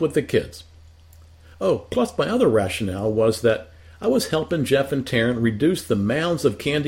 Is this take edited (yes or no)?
no